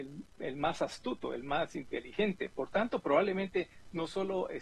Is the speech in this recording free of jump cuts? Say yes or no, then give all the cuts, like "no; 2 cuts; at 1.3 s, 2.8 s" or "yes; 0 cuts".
yes; 0 cuts